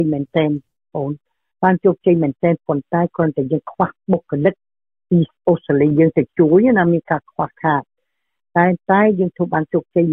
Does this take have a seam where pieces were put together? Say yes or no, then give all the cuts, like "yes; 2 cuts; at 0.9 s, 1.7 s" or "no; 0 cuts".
no; 0 cuts